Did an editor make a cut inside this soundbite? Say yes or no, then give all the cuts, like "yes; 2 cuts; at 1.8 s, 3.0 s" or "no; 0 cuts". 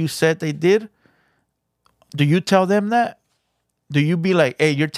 no; 0 cuts